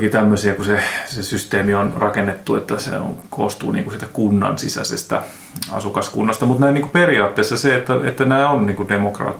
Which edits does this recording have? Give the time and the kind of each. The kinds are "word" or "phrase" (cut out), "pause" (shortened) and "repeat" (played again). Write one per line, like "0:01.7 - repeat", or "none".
none